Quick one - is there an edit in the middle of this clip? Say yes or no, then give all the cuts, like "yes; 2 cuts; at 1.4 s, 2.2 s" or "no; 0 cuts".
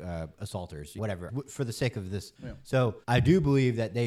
yes; 4 cuts; at 1.0 s, 1.3 s, 2.3 s, 3.0 s